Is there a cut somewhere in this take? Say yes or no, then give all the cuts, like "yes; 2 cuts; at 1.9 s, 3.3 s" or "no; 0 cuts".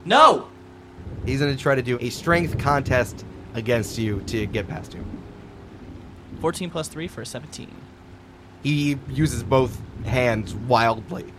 no; 0 cuts